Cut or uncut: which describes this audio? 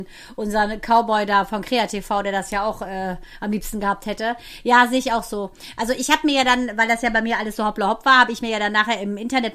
uncut